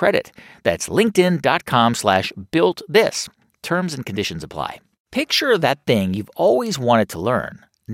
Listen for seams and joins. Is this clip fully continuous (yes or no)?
yes